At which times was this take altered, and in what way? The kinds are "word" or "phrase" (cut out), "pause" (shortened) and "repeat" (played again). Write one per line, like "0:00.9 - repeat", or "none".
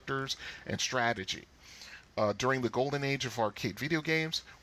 none